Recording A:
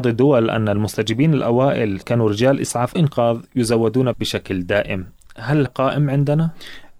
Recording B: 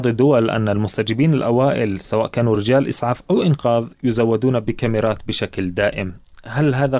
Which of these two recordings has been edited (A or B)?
A